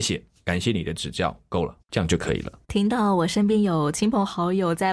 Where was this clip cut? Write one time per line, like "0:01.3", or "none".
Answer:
0:01.8
0:02.6